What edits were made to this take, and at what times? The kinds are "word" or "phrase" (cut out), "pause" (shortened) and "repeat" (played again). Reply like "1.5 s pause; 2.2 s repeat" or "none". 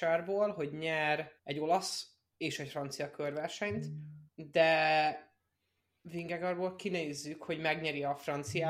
1.4 s pause; 4.3 s pause

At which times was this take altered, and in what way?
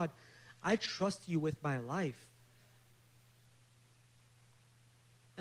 none

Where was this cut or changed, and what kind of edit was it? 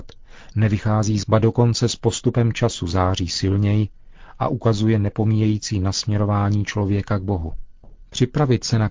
1.2 s word

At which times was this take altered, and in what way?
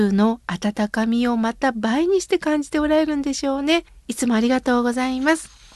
3.9 s pause

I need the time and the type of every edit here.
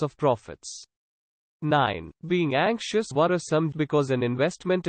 2.1 s pause; 3.1 s word; 3.7 s word

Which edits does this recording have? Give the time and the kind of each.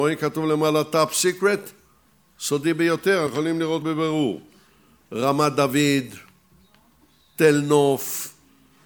3.3 s word; 3.8 s word

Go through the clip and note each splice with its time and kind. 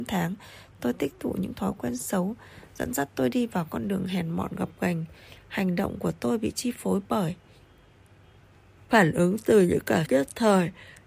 8.9 s pause; 10.1 s word

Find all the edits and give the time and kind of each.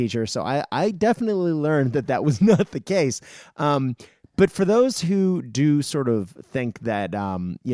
none

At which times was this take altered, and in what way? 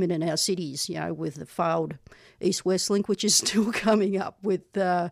none

